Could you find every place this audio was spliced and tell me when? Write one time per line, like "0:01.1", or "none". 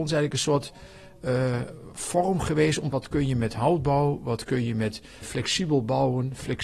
0:02.9
0:05.2